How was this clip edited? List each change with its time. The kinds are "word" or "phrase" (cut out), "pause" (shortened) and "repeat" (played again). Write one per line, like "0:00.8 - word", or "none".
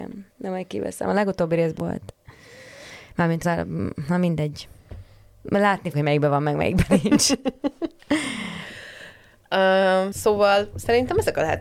0:01.8 - word
0:03.4 - word
0:05.9 - word
0:10.1 - word